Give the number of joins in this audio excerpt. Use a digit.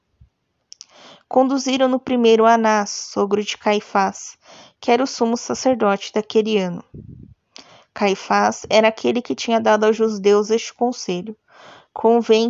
0